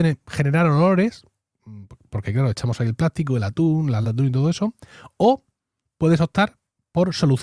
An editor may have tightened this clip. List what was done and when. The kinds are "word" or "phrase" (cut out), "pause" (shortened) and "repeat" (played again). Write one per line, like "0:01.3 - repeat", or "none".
0:04.0 - word